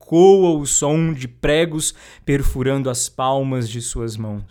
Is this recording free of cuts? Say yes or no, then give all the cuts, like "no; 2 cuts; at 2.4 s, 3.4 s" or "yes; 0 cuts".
yes; 0 cuts